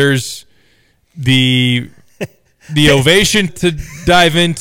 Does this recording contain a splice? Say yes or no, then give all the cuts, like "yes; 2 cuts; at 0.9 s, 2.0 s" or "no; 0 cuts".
yes; 1 cut; at 3.5 s